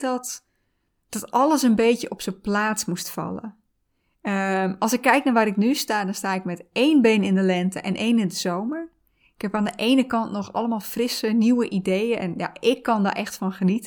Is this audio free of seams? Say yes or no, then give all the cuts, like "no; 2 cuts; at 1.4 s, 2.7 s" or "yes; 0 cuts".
yes; 0 cuts